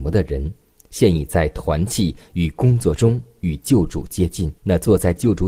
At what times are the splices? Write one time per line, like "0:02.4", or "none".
0:04.6

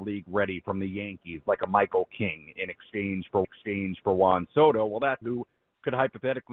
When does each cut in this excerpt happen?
0:03.4
0:05.2

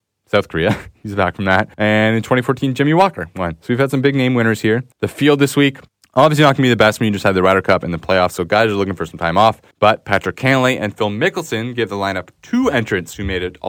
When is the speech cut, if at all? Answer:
0:01.7
0:04.9
0:05.9
0:09.7

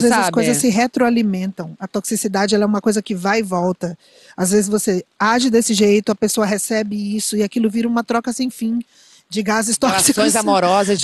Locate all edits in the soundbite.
none

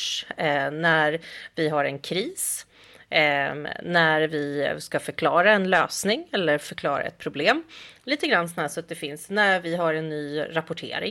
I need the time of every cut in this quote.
none

